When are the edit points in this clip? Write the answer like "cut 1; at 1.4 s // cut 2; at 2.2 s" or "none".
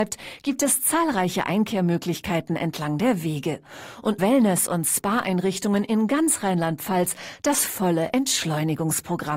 cut 1; at 4.2 s